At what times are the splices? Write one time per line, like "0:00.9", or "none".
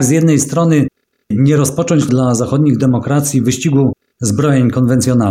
0:02.1